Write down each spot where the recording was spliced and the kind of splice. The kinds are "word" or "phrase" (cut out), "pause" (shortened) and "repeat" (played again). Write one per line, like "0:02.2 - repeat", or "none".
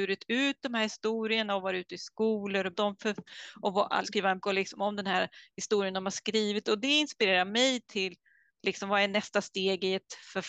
0:02.7 - word
0:04.0 - word
0:04.4 - word